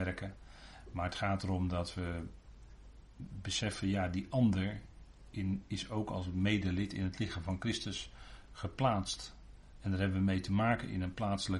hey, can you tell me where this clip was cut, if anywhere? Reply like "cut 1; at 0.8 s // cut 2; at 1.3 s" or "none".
none

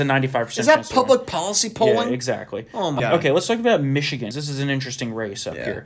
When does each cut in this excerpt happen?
cut 1; at 3.0 s // cut 2; at 4.3 s

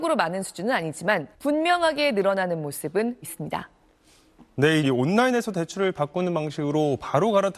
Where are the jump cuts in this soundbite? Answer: cut 1; at 1.3 s // cut 2; at 3.2 s // cut 3; at 4.8 s

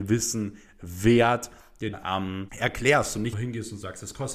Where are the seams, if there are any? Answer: cut 1; at 1.9 s // cut 2; at 2.5 s // cut 3; at 3.3 s

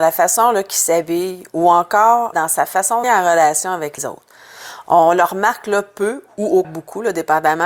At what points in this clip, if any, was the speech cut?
cut 1; at 2.3 s // cut 2; at 3.0 s // cut 3; at 4.0 s // cut 4; at 6.6 s

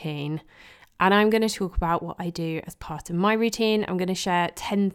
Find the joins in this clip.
none

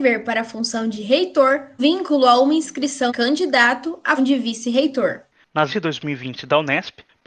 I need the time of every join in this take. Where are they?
cut 1; at 1.8 s // cut 2; at 3.1 s // cut 3; at 4.2 s // cut 4; at 5.7 s

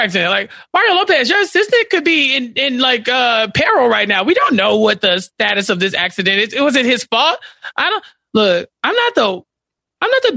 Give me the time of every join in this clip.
none

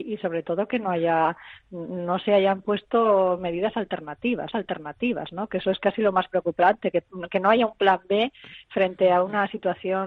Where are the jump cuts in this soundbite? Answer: cut 1; at 4.5 s

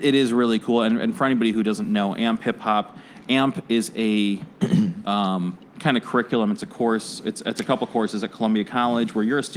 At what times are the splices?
none

